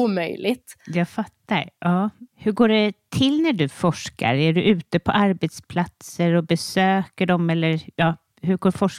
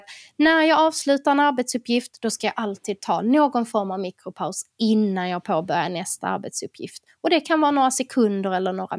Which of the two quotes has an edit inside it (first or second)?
first